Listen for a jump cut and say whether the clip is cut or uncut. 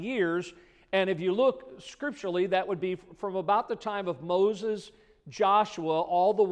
uncut